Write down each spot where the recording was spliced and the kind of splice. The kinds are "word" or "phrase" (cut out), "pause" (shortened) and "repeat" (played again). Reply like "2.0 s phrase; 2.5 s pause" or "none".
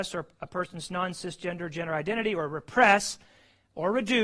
none